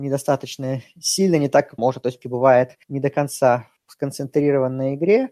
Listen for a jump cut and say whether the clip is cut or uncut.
cut